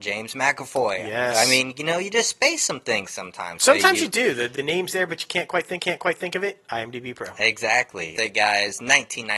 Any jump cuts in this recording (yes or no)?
yes